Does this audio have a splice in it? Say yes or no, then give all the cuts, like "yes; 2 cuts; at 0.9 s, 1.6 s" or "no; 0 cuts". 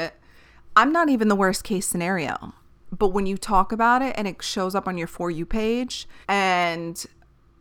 yes; 1 cut; at 6.2 s